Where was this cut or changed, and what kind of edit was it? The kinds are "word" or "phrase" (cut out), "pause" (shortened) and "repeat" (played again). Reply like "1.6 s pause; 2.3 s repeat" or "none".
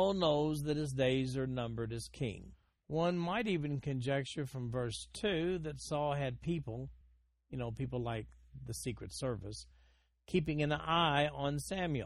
none